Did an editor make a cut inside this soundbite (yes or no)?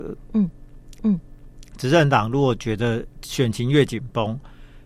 yes